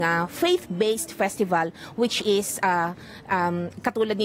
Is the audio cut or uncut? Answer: uncut